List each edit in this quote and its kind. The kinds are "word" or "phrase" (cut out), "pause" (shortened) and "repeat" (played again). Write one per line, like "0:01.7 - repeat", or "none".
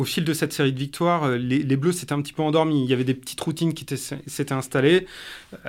none